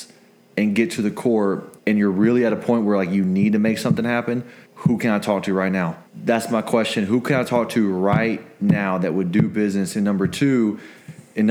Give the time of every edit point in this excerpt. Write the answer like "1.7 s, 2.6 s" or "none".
1.8 s, 4.6 s, 6.1 s